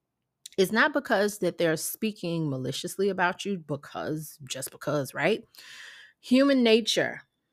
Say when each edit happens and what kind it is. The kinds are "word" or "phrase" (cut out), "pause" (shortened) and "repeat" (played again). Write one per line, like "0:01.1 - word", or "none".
none